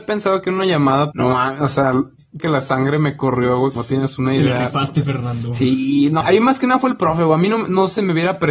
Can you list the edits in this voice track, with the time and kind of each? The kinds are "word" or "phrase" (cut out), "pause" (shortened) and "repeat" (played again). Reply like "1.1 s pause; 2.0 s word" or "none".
1.1 s word; 2.4 s word; 3.8 s word; 6.2 s word